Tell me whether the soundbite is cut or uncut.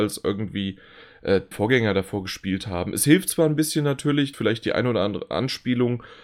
cut